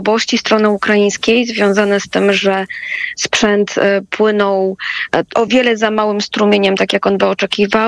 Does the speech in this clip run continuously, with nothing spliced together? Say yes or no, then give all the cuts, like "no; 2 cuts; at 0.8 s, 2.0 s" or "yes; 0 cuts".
yes; 0 cuts